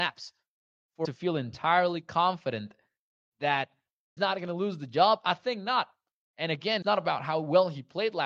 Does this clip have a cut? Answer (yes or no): yes